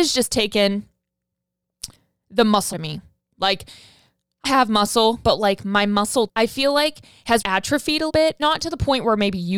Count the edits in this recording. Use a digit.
7